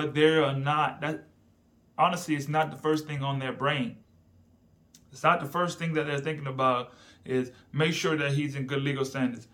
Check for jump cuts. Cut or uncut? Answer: uncut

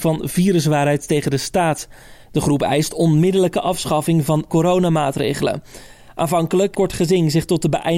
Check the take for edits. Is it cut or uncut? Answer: cut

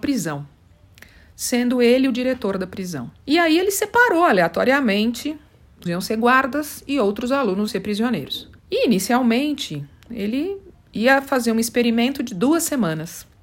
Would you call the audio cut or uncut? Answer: cut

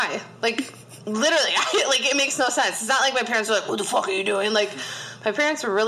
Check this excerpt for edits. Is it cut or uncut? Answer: uncut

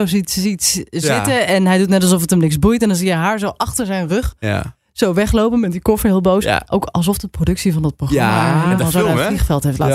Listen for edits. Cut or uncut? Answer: uncut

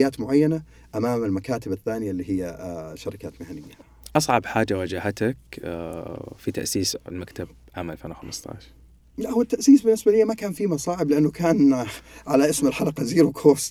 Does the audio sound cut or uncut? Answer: uncut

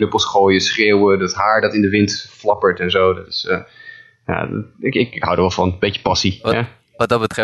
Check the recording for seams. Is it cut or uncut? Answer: uncut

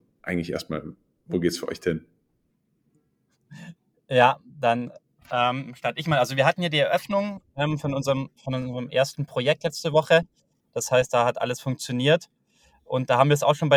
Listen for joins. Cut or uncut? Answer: uncut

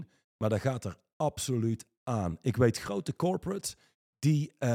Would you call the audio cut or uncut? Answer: uncut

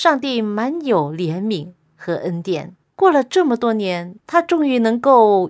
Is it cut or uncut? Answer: cut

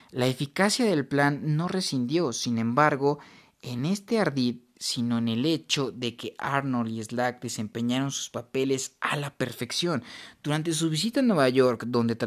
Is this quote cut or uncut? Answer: uncut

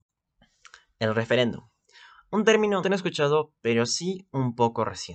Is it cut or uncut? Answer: cut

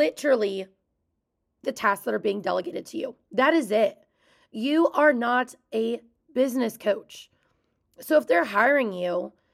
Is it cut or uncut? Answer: cut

